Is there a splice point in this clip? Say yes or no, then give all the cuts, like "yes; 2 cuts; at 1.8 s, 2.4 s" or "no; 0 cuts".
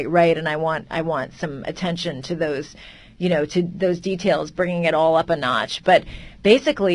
no; 0 cuts